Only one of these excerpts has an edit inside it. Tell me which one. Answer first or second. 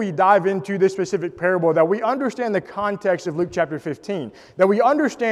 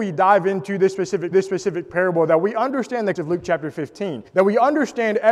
second